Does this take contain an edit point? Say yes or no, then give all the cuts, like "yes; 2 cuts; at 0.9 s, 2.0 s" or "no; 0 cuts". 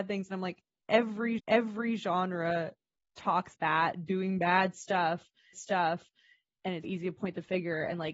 yes; 4 cuts; at 1.4 s, 3.5 s, 5.5 s, 6.8 s